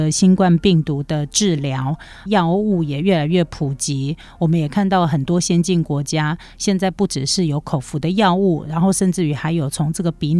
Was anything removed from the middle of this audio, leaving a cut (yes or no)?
yes